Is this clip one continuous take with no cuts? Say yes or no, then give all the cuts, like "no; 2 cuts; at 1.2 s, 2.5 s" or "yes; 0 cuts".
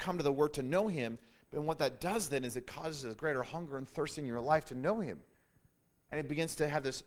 yes; 0 cuts